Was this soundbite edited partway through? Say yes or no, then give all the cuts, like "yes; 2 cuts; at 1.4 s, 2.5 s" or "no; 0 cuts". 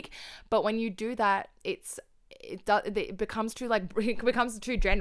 no; 0 cuts